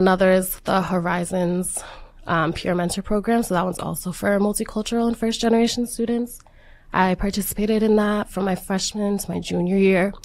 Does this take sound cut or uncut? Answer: uncut